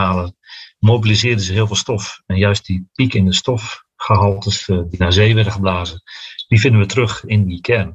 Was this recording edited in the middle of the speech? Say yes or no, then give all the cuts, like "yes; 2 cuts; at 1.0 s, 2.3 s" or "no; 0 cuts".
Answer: no; 0 cuts